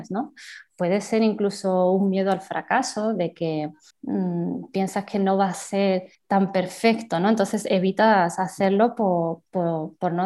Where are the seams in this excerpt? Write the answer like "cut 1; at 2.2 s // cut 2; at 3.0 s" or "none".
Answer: cut 1; at 3.9 s // cut 2; at 6.1 s